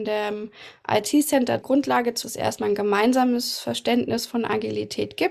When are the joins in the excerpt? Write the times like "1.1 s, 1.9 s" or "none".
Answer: 1.6 s, 2.2 s